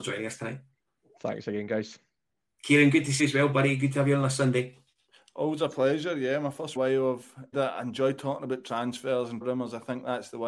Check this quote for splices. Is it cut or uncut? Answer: cut